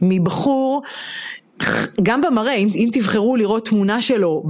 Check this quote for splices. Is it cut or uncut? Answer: uncut